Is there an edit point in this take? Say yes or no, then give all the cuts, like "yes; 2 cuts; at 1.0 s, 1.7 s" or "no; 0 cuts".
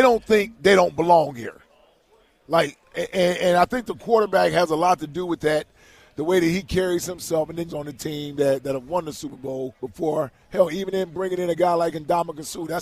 yes; 2 cuts; at 7.7 s, 9.8 s